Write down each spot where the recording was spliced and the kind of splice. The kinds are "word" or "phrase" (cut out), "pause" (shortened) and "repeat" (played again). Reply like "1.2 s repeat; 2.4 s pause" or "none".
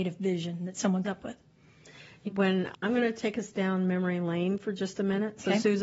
1.0 s word; 2.3 s word; 2.7 s word